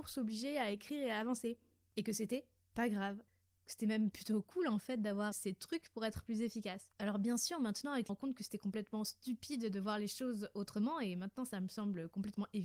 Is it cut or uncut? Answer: cut